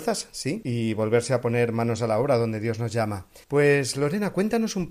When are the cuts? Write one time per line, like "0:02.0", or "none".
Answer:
0:03.4